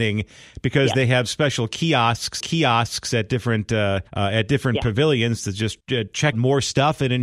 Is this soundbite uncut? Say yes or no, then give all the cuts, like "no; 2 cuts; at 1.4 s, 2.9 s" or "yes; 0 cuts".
no; 4 cuts; at 2.4 s, 4.1 s, 5.8 s, 6.3 s